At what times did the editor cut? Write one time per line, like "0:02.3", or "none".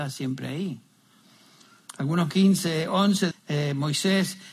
0:02.3
0:03.3